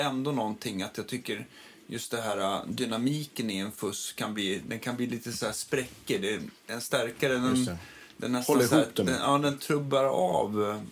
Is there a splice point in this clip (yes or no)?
no